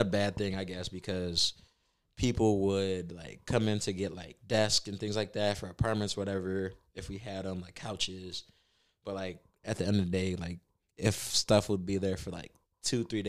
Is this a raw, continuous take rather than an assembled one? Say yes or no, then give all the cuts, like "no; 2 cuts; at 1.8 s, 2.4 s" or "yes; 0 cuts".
yes; 0 cuts